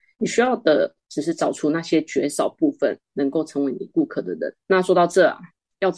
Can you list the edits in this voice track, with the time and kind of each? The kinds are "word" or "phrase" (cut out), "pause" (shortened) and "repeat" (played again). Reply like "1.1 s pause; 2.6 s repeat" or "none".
4.6 s pause